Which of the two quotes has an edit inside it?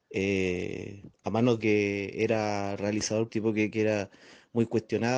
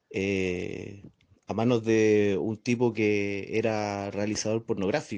first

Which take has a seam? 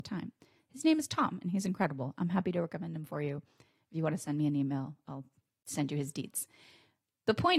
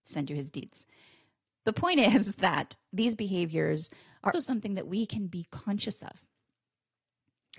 second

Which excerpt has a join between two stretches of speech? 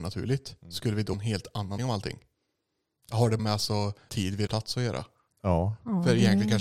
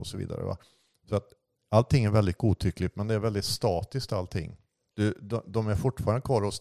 first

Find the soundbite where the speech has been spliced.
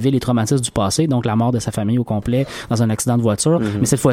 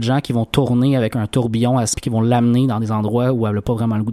second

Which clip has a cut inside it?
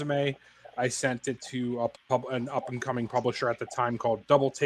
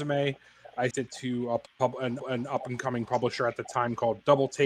second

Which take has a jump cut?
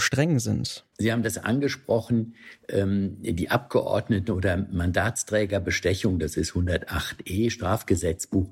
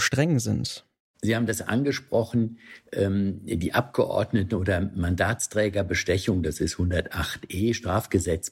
first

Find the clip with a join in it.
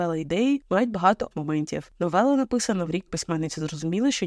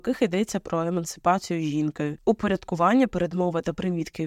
first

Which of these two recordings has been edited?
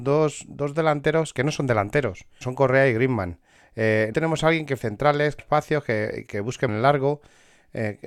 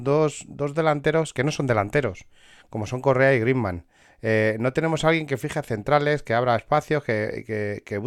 first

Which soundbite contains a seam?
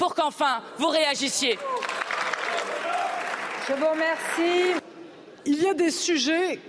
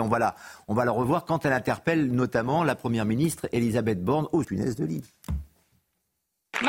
second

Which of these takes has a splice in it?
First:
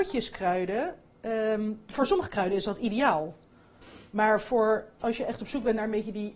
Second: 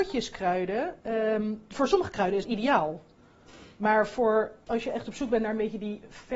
second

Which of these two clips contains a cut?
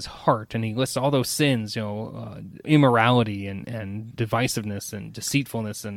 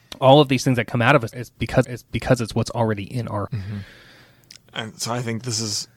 second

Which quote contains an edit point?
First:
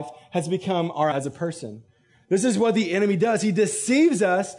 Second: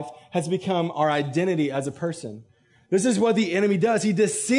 first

